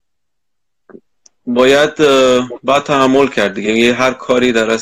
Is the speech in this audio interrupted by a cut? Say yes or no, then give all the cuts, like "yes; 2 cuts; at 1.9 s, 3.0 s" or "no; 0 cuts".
no; 0 cuts